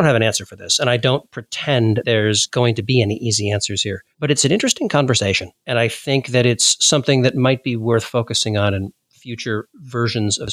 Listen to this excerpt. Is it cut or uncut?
cut